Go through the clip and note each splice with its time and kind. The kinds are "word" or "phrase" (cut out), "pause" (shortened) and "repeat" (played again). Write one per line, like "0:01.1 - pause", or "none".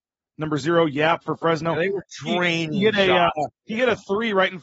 none

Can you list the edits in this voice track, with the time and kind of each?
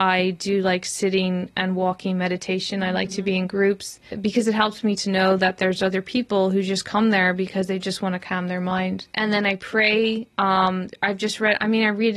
0:09.1 - pause

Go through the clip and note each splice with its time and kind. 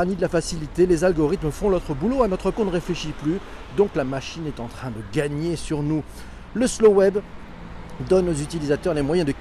0:02.5 - phrase

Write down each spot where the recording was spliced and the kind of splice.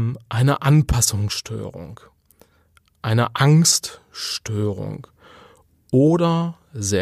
none

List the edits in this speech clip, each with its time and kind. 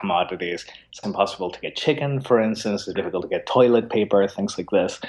0:01.0 - word
0:03.0 - word

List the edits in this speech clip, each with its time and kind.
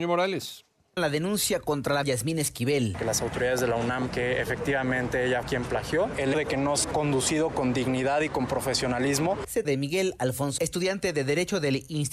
0:01.0 - word
0:02.0 - word
0:04.1 - word
0:05.4 - word
0:06.3 - word
0:06.8 - word
0:09.6 - word
0:10.6 - word

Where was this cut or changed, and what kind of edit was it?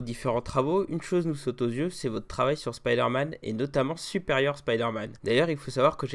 0:05.2 - pause

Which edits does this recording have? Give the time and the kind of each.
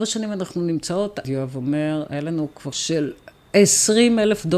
0:01.2 - phrase
0:02.7 - word

